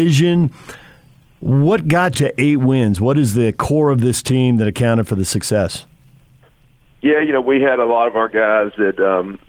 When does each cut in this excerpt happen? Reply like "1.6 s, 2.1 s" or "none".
2.1 s